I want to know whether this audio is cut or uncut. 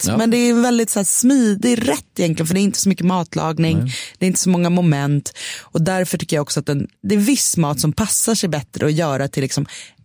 cut